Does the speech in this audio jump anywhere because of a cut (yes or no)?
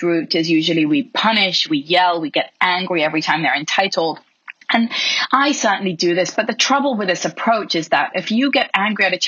no